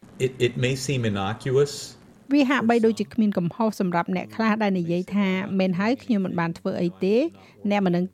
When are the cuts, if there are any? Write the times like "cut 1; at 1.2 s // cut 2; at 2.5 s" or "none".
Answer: none